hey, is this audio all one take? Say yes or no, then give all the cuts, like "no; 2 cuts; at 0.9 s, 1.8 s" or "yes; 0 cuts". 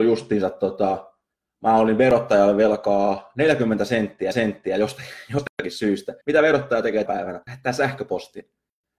no; 3 cuts; at 4.3 s, 6.2 s, 7.1 s